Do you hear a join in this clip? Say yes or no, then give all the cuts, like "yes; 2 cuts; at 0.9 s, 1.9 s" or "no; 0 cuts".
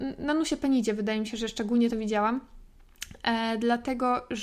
no; 0 cuts